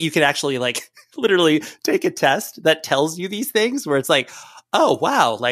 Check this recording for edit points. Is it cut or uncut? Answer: uncut